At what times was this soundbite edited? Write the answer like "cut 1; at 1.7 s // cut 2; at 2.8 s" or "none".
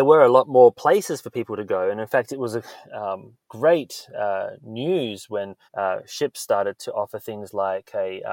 cut 1; at 5.7 s